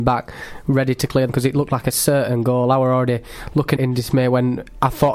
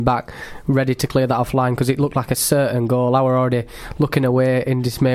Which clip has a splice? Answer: first; 2 cuts; at 1.3 s, 3.8 s

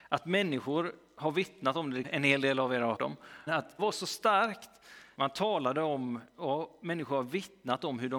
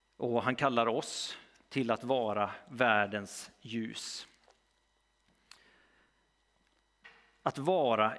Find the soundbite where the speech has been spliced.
first; 5 cuts; at 2.0 s, 3.0 s, 3.5 s, 3.8 s, 5.1 s

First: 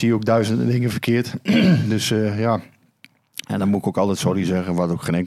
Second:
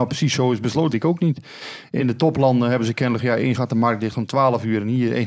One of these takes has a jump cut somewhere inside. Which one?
second; 4 cuts; at 0.9 s, 2.0 s, 3.2 s, 3.5 s

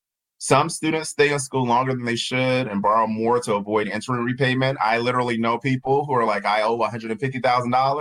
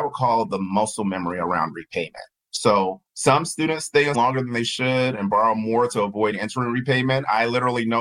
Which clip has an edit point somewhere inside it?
second; 2 cuts; at 3.1 s, 4.1 s

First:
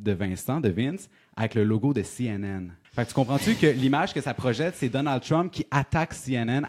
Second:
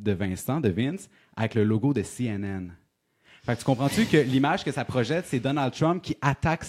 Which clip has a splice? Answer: first; 1 cut; at 2.8 s

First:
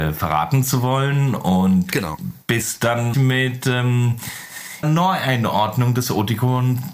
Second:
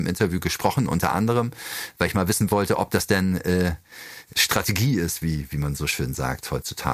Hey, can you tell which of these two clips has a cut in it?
first; 2 cuts; at 3.1 s, 4.8 s

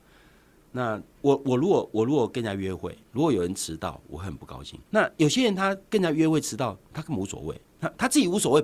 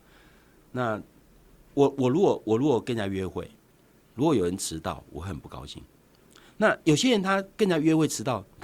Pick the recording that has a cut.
first; 4 cuts; at 1.1 s, 3.1 s, 4.9 s, 7.7 s

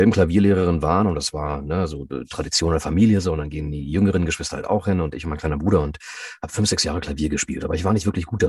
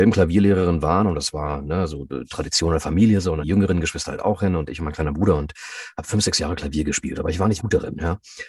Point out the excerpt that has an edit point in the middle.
second; 2 cuts; at 3.4 s, 7.6 s

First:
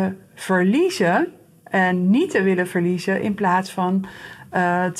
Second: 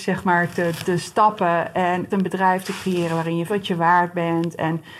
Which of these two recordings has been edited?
second; 2 cuts; at 2.1 s, 3.5 s

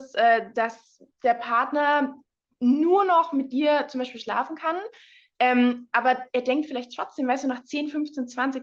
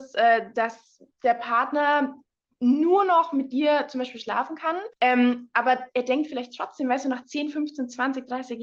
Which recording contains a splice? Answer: second; 1 cut; at 4.9 s

